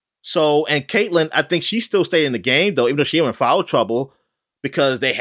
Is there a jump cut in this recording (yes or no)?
no